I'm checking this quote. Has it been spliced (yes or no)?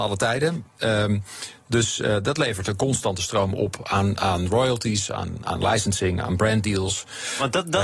no